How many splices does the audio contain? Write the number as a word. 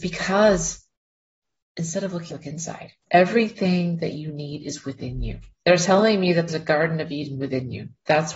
four